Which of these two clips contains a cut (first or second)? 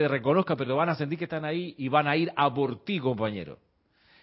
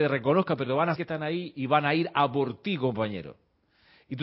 second